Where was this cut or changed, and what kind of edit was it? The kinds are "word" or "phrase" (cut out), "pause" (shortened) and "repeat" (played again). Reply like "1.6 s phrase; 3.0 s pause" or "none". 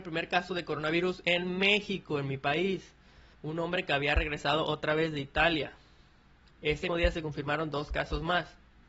3.3 s pause; 6.9 s word

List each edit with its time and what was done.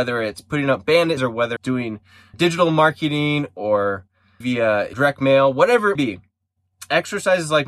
1.2 s word; 1.6 s word; 2.3 s word; 4.4 s word; 4.9 s word; 6.0 s word

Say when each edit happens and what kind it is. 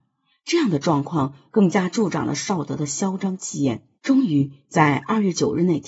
4.0 s pause

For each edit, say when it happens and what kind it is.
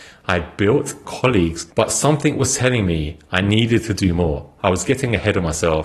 1.0 s phrase

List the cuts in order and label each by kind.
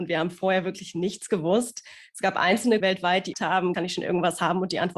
2.8 s word; 3.3 s phrase

